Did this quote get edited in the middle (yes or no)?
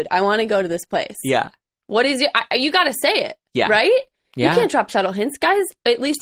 no